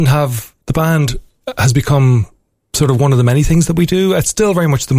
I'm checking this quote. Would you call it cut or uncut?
uncut